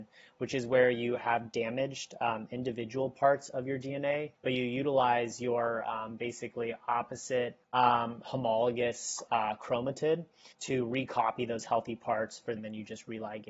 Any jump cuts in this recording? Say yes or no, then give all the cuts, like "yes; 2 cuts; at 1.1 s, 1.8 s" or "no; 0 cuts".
yes; 4 cuts; at 4.4 s, 7.6 s, 10.5 s, 12.6 s